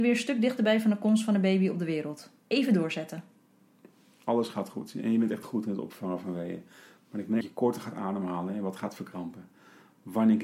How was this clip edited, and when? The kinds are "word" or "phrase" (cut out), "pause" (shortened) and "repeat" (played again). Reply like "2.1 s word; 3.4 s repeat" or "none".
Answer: 5.4 s word; 7.4 s word